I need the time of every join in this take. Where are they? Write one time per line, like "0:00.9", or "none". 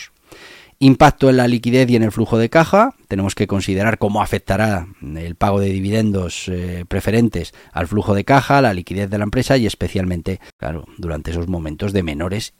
0:10.5